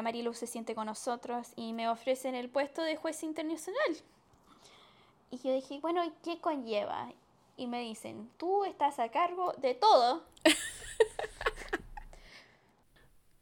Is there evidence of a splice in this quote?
no; 0 cuts

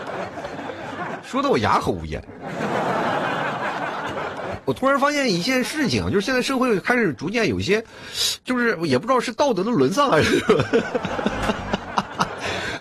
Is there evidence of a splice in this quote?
no; 0 cuts

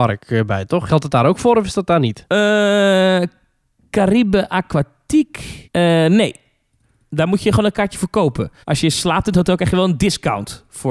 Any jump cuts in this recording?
yes; 2 cuts; at 5.6 s, 8.6 s

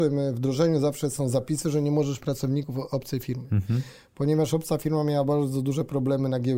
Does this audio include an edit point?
yes; 1 cut; at 2.2 s

